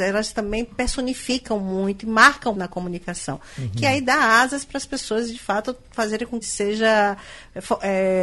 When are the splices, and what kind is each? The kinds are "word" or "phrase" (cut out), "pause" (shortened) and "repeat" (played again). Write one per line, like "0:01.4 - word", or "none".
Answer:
0:02.5 - word
0:06.4 - phrase